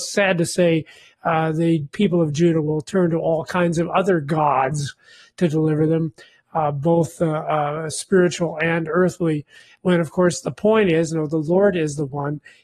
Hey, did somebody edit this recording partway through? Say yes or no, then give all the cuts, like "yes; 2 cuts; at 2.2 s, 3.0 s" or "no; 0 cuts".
no; 0 cuts